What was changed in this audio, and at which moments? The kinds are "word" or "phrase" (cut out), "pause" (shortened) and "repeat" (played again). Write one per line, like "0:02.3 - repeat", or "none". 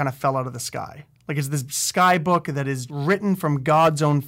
0:02.9 - word

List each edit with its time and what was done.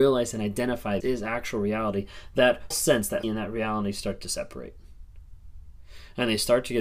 0:01.0 - word
0:02.7 - word
0:03.2 - word

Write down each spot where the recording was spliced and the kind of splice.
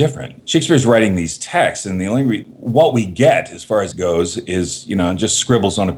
0:03.9 - phrase

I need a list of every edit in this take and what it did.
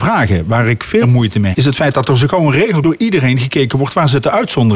0:01.0 - word
0:01.5 - word
0:02.8 - phrase

